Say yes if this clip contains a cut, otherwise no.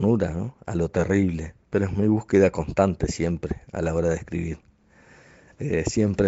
yes